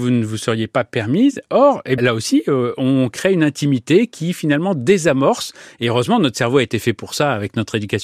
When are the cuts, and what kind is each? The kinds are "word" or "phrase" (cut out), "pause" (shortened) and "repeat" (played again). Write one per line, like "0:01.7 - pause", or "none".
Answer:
0:02.0 - word